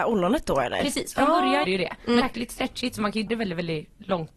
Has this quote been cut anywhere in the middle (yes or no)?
yes